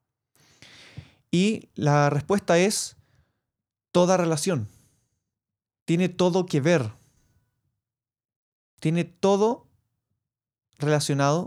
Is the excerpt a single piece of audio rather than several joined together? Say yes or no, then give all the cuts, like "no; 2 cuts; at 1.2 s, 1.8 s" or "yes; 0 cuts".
yes; 0 cuts